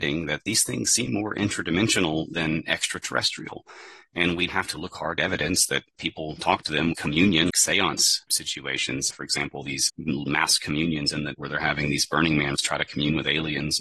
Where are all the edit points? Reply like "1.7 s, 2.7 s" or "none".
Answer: 4.5 s, 5.2 s, 6.9 s, 7.5 s, 8.3 s, 9.1 s, 9.9 s, 11.3 s, 12.5 s